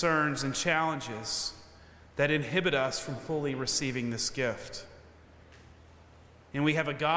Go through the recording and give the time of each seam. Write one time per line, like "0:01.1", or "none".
none